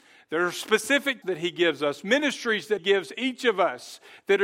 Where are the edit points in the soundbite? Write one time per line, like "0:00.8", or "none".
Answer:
0:01.2
0:02.8